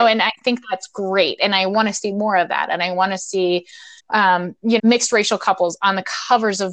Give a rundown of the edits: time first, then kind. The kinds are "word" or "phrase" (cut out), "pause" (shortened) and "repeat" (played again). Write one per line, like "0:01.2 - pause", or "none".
0:04.0 - pause
0:04.8 - word

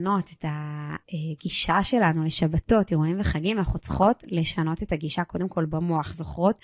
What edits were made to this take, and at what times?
0:01.0 - pause

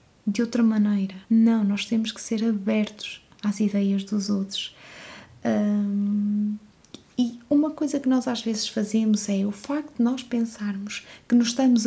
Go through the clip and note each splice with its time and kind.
0:01.2 - pause
0:03.3 - pause

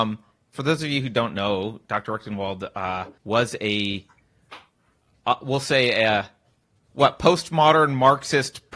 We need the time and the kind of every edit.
0:03.2 - pause

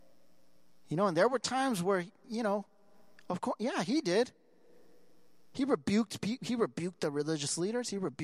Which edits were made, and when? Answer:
none

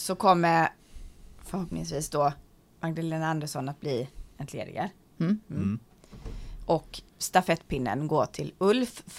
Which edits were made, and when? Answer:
0:07.1 - word

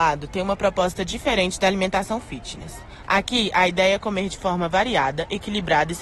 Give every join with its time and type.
none

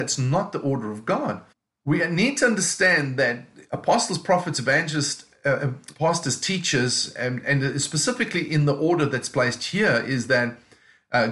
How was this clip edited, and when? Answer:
0:01.5 - pause
0:05.9 - word

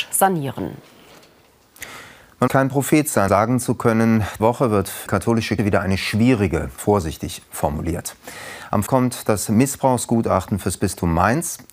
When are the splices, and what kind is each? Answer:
0:02.5 - word
0:03.3 - word
0:04.4 - word
0:05.1 - word
0:05.6 - word
0:06.8 - word
0:08.9 - word

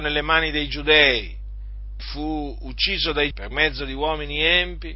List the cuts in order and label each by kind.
0:02.0 - word
0:03.3 - word

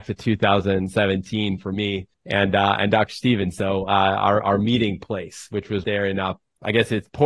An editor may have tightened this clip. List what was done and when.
0:02.1 - pause
0:05.8 - phrase

